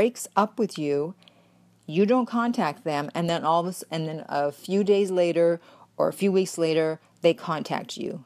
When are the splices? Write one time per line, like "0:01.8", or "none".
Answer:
none